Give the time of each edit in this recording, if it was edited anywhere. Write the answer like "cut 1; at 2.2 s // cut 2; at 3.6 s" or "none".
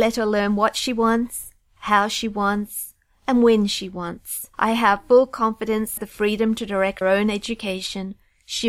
cut 1; at 4.5 s // cut 2; at 6.0 s // cut 3; at 7.0 s